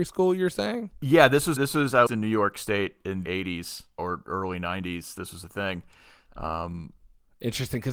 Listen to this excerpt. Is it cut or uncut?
cut